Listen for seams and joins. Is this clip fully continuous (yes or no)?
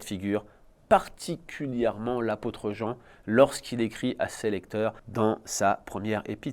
no